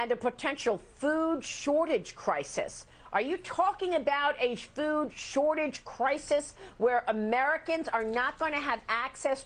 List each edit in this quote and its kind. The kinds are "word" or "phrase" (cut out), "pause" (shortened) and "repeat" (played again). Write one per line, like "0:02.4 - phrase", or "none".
none